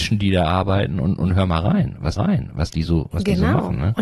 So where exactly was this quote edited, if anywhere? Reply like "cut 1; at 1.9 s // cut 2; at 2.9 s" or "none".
cut 1; at 2.2 s